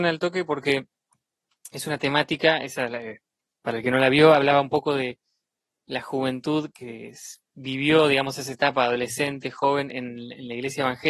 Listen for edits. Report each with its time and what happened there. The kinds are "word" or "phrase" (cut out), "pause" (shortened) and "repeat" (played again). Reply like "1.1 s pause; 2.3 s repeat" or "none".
6.7 s word